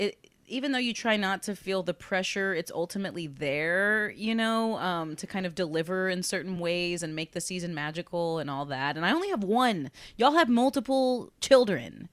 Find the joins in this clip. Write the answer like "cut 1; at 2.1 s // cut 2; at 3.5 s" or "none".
none